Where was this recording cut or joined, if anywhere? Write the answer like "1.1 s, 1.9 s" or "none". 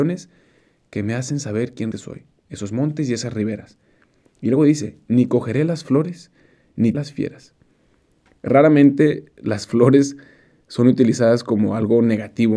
1.9 s, 6.9 s